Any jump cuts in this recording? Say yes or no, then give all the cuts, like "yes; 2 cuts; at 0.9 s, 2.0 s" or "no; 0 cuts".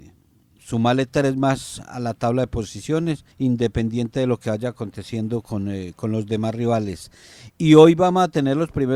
yes; 1 cut; at 3.3 s